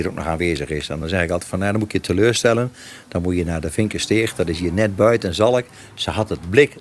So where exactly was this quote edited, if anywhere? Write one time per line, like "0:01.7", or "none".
none

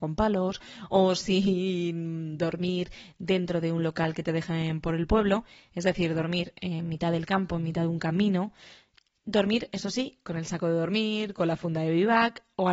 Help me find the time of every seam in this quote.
none

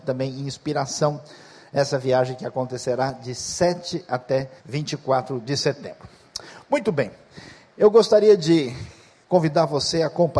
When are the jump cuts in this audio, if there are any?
0:04.6

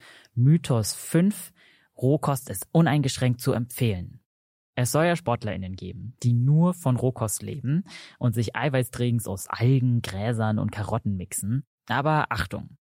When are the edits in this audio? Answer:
none

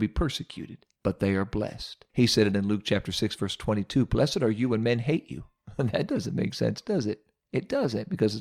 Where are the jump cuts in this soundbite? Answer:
0:00.9
0:02.1

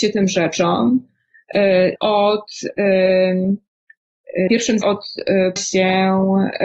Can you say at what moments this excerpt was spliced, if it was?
0:02.0
0:04.5
0:04.8
0:05.6

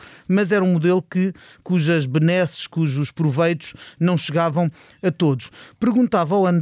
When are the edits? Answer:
none

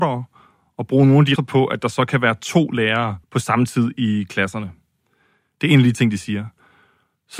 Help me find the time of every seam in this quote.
0:01.4
0:03.2

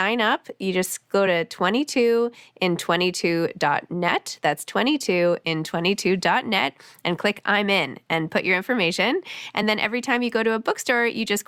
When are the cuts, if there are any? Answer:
none

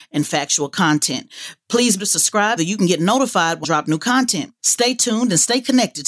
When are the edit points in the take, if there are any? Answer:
0:02.0
0:02.6
0:03.6
0:04.6

